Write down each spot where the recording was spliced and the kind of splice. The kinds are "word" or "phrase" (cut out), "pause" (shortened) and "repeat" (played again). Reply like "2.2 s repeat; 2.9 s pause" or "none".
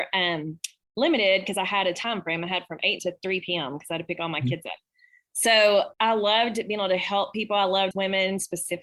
3.0 s phrase; 5.9 s pause; 7.9 s phrase